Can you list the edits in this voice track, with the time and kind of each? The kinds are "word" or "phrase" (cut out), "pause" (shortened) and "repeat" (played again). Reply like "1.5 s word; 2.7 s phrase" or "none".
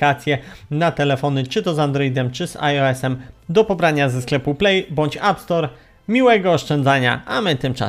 none